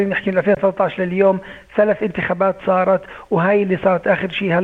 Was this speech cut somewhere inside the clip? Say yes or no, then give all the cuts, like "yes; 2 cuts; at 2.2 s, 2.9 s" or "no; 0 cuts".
no; 0 cuts